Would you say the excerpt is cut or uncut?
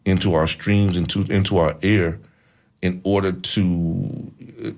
uncut